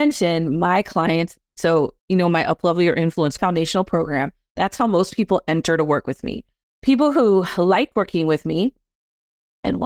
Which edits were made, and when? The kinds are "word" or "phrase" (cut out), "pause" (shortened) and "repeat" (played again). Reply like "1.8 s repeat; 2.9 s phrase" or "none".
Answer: 2.0 s pause; 3.4 s phrase; 6.6 s pause